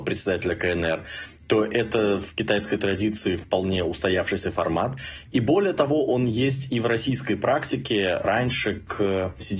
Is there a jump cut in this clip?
no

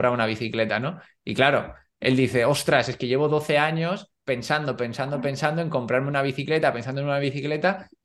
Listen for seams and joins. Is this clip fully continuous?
yes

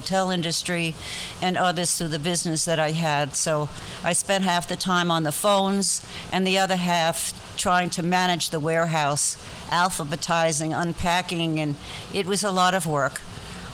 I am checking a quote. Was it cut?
no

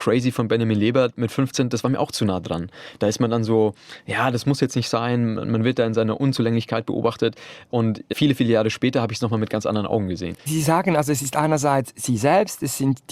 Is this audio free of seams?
no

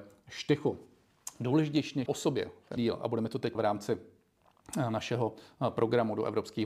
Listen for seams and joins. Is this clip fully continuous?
no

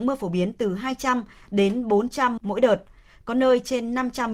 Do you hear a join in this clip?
yes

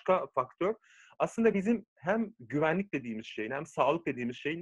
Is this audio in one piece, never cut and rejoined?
yes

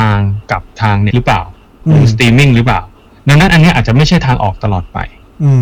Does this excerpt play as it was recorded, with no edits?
no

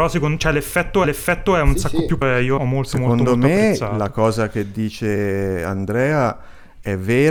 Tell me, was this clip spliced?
yes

